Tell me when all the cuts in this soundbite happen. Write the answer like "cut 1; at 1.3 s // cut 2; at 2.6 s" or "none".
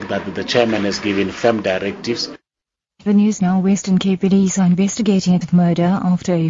cut 1; at 3.1 s // cut 2; at 5.4 s